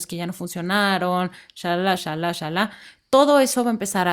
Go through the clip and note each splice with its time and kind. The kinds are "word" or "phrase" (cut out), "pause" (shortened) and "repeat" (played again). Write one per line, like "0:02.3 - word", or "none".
0:02.0 - word